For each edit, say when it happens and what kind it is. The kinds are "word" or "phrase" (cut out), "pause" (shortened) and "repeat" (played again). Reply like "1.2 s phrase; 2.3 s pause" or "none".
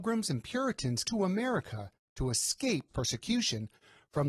1.0 s word; 2.9 s word